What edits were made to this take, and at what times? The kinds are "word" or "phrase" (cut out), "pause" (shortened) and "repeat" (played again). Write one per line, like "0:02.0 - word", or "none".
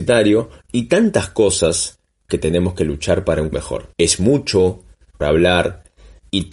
0:02.3 - word
0:03.5 - word
0:03.9 - pause
0:05.2 - word

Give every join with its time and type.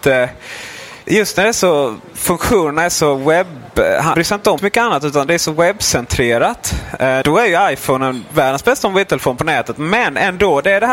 0:01.0 - pause
0:04.1 - word
0:04.6 - word
0:07.2 - word

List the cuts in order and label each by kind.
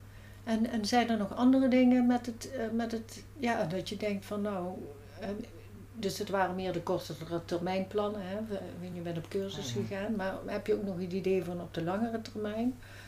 none

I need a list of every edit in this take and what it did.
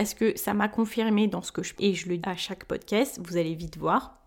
0:01.8 - word
0:02.2 - word

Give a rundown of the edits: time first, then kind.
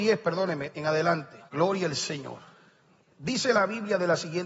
0:01.5 - pause

